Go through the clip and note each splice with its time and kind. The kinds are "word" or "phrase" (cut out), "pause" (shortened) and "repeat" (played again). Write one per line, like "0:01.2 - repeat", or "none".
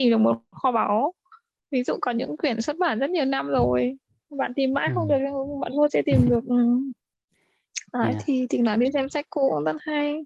0:04.1 - pause
0:05.9 - word